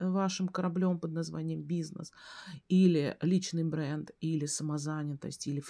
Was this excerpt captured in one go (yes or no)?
yes